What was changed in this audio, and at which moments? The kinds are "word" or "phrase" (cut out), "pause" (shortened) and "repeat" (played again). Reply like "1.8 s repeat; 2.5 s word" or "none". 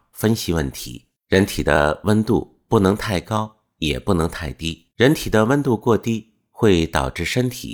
1.2 s pause; 4.9 s pause

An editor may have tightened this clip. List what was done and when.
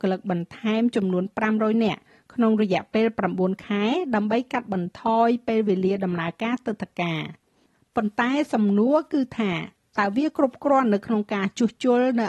none

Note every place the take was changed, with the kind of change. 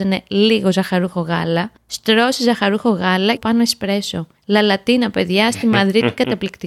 1.8 s pause; 3.4 s phrase; 4.4 s pause

